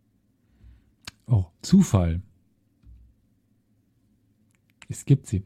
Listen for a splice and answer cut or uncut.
cut